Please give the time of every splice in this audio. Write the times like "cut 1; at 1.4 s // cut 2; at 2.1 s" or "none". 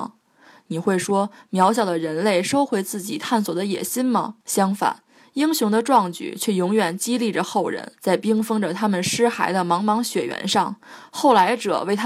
cut 1; at 4.4 s // cut 2; at 8.0 s